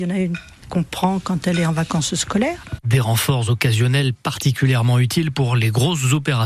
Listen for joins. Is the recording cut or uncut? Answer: uncut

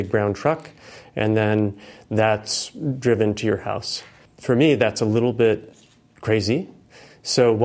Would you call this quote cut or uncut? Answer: uncut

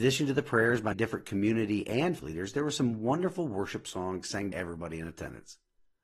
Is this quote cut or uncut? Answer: cut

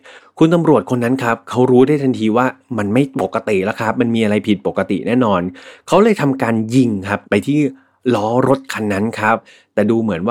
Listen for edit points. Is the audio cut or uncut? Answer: cut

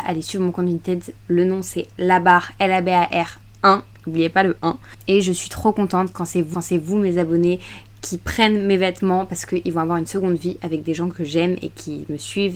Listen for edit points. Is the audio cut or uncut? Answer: cut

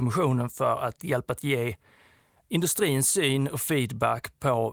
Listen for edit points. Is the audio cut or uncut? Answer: cut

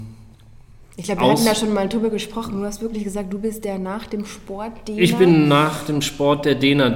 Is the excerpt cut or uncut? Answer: uncut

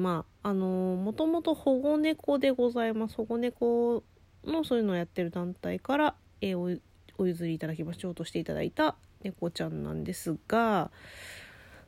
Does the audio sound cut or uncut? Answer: uncut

